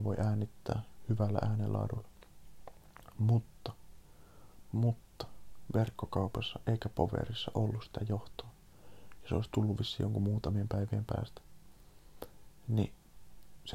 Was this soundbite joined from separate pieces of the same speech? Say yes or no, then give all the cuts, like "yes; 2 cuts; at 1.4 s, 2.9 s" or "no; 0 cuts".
no; 0 cuts